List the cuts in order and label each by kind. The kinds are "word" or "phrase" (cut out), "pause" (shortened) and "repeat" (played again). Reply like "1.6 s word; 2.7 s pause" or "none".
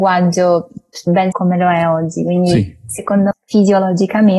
1.3 s word; 3.3 s word